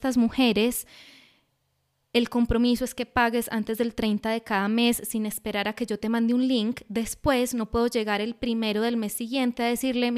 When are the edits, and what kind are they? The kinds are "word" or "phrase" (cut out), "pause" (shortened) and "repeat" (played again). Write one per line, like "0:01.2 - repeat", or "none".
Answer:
none